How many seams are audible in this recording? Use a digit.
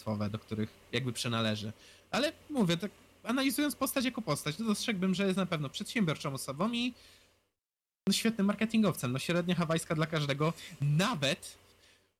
0